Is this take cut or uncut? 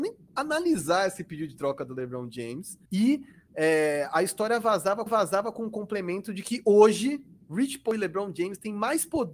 cut